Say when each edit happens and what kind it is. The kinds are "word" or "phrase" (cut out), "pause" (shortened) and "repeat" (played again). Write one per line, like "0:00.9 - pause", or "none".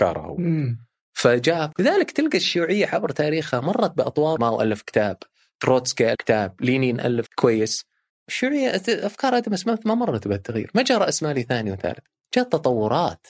0:01.7 - phrase
0:04.4 - phrase
0:06.1 - word
0:07.3 - word
0:08.1 - pause